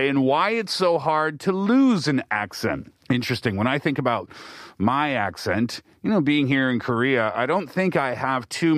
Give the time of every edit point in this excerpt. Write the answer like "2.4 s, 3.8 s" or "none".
3.0 s